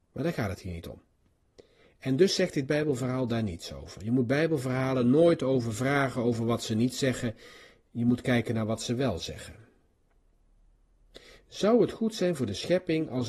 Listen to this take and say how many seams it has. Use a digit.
0